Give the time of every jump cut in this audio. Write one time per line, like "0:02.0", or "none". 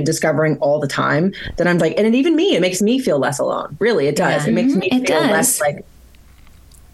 0:01.8

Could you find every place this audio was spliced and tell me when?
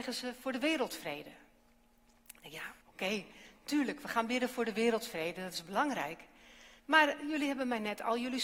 0:02.8
0:06.8

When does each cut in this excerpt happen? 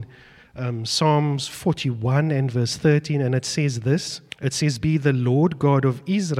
0:04.3
0:04.8

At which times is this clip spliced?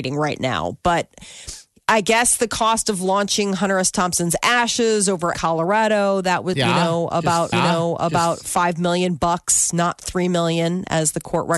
0:05.3
0:06.5
0:07.5

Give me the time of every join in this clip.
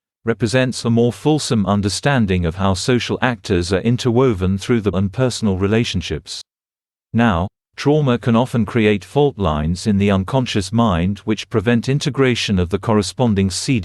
0:04.9

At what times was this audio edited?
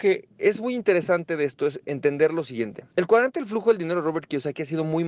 0:02.9

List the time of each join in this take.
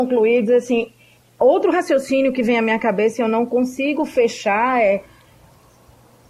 none

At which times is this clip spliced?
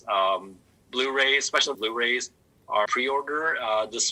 0:01.7
0:02.9

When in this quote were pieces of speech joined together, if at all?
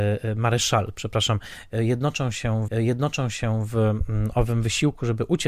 0:02.7

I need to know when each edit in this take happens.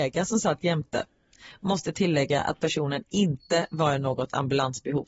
none

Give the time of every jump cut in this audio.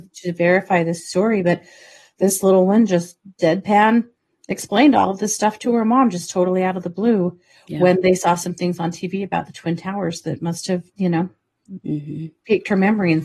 0:10.9

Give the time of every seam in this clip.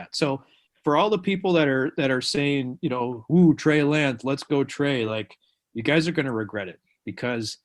none

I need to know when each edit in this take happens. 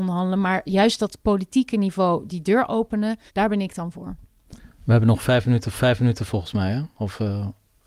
0:03.3
0:05.7

